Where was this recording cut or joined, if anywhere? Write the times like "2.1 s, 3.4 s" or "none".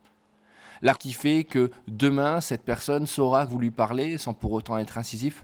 1.0 s, 3.5 s

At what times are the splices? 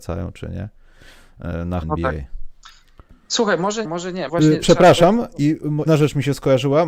1.8 s, 3.8 s, 4.3 s, 5.9 s

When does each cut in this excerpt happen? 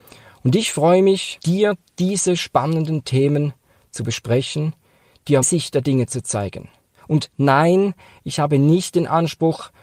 1.4 s, 5.4 s

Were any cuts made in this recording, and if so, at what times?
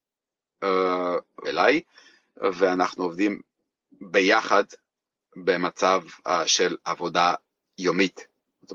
1.4 s

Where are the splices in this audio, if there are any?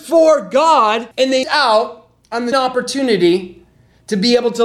1.1 s, 1.4 s, 2.5 s

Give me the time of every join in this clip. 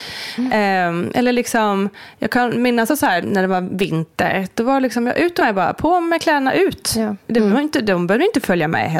2.9 s, 3.2 s, 5.4 s

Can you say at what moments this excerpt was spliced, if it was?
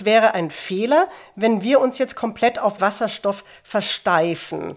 2.8 s

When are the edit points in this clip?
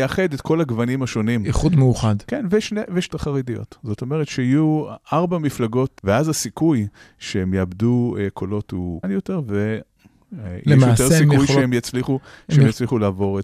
3.1 s, 6.0 s, 9.0 s

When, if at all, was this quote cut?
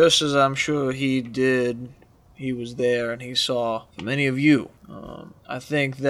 none

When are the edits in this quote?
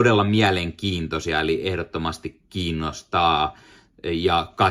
none

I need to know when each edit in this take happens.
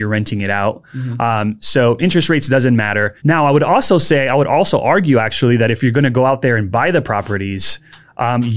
3.2 s

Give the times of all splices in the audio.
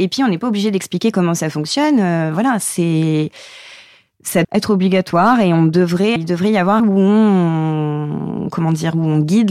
4.4 s, 6.2 s, 6.8 s

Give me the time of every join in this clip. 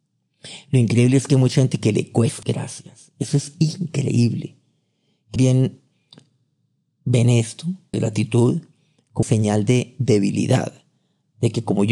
2.4 s, 5.4 s, 7.9 s, 9.2 s

